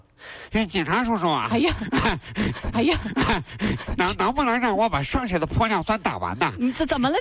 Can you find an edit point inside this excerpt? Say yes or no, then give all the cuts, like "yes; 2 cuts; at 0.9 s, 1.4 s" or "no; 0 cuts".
yes; 1 cut; at 2.7 s